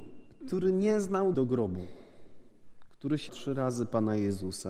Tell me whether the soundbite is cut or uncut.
cut